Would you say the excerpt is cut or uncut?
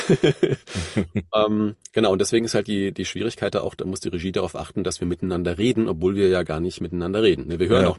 uncut